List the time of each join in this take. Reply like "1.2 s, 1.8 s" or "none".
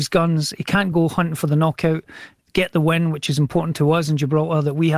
none